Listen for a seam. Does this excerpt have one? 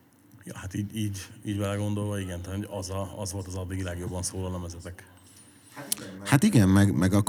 no; 0 cuts

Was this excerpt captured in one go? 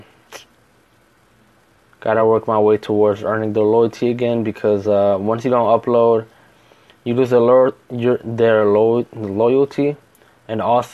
yes; 0 cuts

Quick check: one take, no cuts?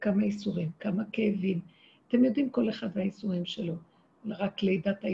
yes; 0 cuts

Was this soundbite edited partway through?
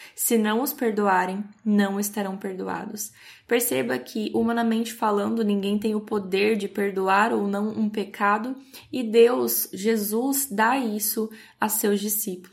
no; 0 cuts

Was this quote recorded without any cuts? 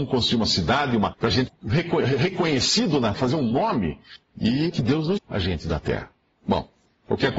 no; 5 cuts; at 1.1 s, 1.5 s, 3.1 s, 4.7 s, 5.2 s

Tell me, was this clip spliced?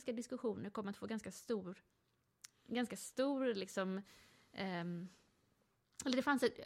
no; 0 cuts

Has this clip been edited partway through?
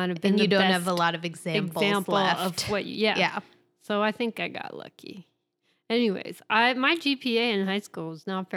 no; 0 cuts

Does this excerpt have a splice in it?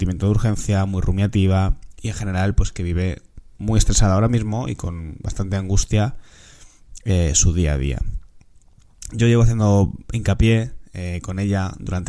no; 0 cuts

